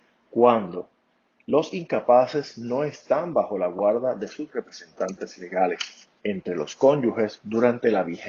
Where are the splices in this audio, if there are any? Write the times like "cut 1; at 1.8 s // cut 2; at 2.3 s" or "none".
cut 1; at 6.2 s